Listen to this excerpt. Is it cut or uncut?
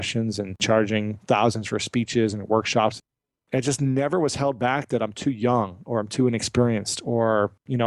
uncut